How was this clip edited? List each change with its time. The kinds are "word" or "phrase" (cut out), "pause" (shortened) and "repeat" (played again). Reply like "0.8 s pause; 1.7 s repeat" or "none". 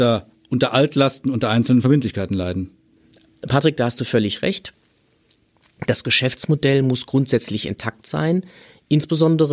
none